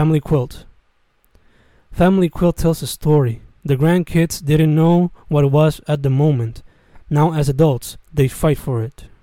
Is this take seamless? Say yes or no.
yes